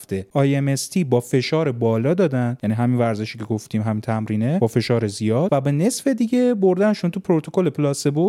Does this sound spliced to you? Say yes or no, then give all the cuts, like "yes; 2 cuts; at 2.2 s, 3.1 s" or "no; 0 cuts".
no; 0 cuts